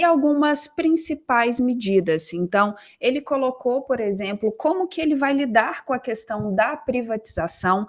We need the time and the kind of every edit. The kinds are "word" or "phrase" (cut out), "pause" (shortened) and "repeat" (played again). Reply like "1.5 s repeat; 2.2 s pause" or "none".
none